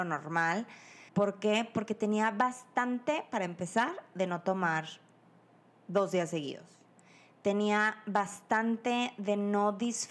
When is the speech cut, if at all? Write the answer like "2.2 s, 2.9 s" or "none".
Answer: 1.1 s